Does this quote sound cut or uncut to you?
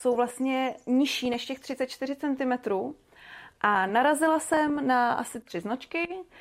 uncut